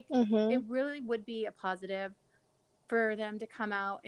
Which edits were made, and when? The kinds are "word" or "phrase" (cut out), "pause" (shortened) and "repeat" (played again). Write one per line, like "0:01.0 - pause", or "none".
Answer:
none